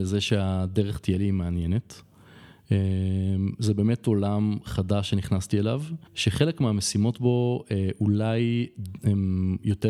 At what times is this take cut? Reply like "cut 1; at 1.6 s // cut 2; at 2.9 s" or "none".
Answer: cut 1; at 6.1 s